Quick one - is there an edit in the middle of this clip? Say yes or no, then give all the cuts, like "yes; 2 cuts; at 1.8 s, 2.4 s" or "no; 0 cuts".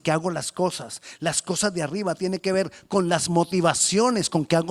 no; 0 cuts